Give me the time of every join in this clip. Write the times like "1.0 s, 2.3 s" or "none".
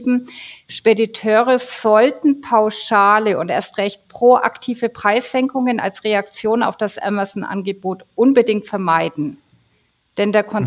none